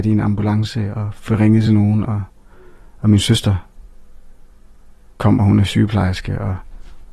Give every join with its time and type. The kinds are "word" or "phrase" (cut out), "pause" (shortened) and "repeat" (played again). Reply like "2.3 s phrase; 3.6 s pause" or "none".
none